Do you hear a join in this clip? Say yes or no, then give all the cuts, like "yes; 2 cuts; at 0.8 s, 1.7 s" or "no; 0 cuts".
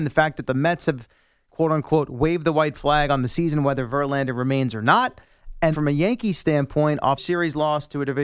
yes; 2 cuts; at 5.7 s, 7.2 s